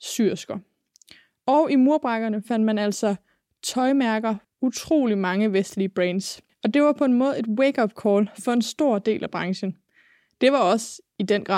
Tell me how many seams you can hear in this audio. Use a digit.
2